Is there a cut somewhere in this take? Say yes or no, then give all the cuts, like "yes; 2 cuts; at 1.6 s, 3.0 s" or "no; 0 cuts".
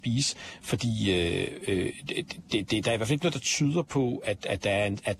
no; 0 cuts